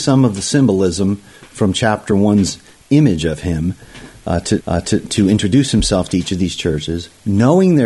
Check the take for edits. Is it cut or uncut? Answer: cut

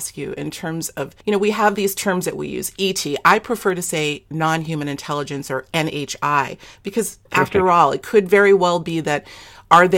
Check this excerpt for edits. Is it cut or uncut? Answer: cut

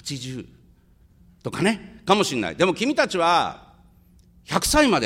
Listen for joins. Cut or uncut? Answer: uncut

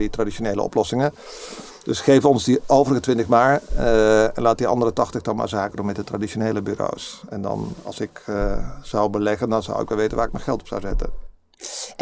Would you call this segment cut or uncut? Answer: uncut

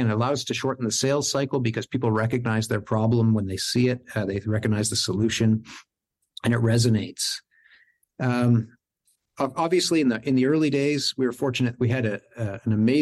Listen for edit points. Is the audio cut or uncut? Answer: uncut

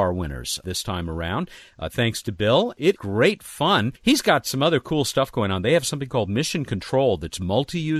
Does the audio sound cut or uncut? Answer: cut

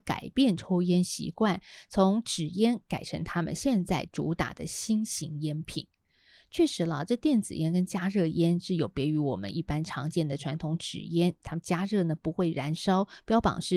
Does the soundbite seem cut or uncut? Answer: uncut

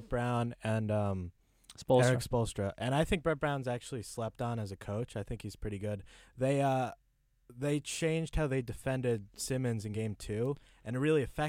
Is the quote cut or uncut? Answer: uncut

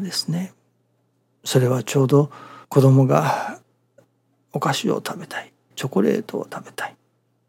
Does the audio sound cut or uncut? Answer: cut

